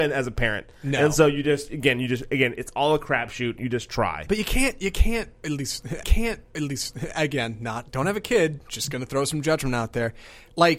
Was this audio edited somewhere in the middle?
yes; 1 cut; at 6.0 s

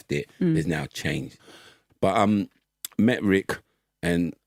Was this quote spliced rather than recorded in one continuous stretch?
no; 0 cuts

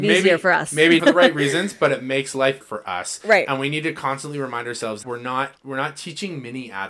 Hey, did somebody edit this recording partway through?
yes; 4 cuts; at 1.0 s, 2.6 s, 5.0 s, 5.6 s

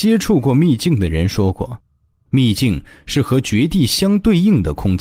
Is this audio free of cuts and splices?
yes; 0 cuts

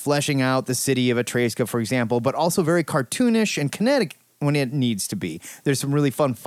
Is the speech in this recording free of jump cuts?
yes; 0 cuts

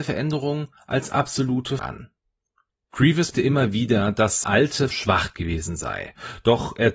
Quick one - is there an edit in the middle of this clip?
yes; 4 cuts; at 1.8 s, 3.3 s, 4.4 s, 4.9 s

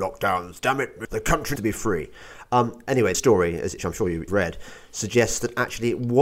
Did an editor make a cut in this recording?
yes; 5 cuts; at 1.0 s, 1.6 s, 3.1 s, 3.8 s, 4.3 s

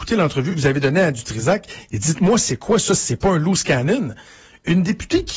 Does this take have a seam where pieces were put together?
no; 0 cuts

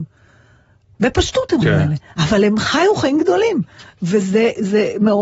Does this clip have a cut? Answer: yes; 1 cut; at 1.6 s

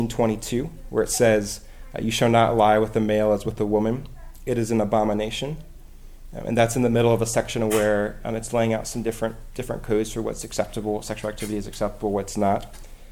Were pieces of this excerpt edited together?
no; 0 cuts

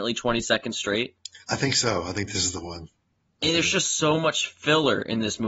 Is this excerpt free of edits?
yes; 0 cuts

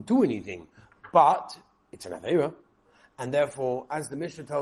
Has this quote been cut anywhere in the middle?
no; 0 cuts

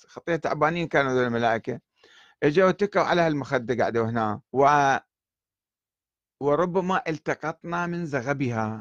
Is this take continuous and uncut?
no; 1 cut; at 4.5 s

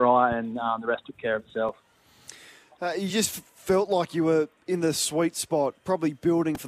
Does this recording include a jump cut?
no; 0 cuts

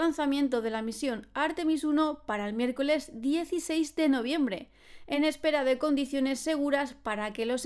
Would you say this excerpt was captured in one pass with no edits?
yes; 0 cuts

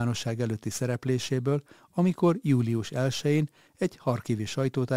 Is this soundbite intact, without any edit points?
yes; 0 cuts

